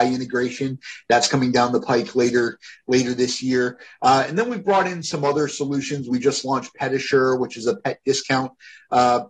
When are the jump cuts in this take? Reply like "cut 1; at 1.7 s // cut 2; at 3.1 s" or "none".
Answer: none

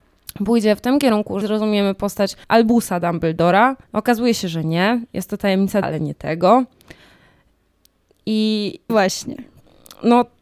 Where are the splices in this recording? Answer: cut 1; at 1.4 s // cut 2; at 2.4 s // cut 3; at 3.8 s // cut 4; at 5.8 s // cut 5; at 8.9 s

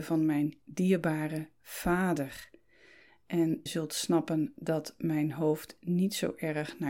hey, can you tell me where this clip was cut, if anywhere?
cut 1; at 3.7 s

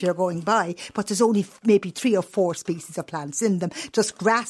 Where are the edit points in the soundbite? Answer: none

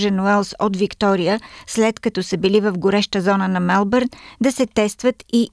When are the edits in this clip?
none

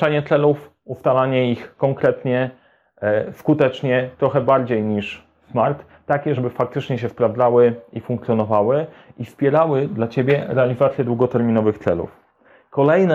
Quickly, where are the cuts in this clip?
none

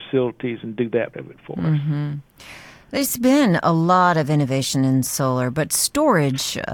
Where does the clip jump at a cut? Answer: cut 1; at 1.1 s

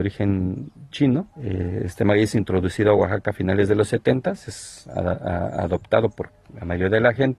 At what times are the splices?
cut 1; at 1.3 s

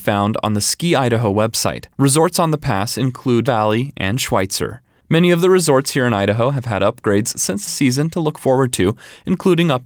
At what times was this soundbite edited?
cut 1; at 3.5 s // cut 2; at 7.7 s

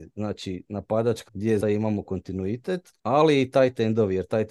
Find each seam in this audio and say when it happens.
cut 1; at 1.3 s // cut 2; at 1.6 s // cut 3; at 3.0 s

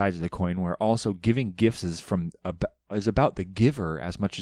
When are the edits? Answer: none

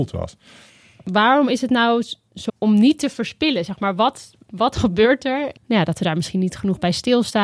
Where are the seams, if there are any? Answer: cut 1; at 2.5 s

